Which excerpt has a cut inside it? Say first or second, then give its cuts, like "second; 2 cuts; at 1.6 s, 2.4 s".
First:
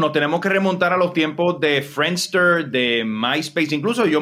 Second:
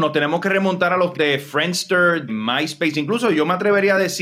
second; 2 cuts; at 1.1 s, 2.3 s